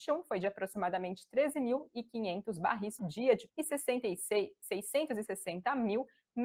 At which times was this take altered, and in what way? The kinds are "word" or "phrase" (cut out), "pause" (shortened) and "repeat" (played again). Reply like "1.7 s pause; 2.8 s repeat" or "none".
3.0 s word; 3.5 s word